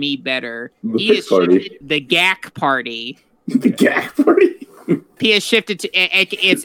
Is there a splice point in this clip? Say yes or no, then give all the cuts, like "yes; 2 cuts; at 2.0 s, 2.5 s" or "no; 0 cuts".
yes; 2 cuts; at 1.8 s, 5.2 s